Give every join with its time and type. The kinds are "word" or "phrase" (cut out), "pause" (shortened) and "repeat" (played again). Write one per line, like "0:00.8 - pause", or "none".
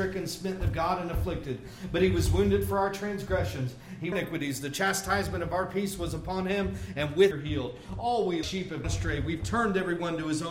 0:04.1 - phrase
0:07.3 - phrase
0:08.4 - word
0:08.8 - word